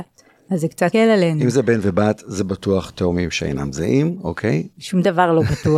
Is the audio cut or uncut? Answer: cut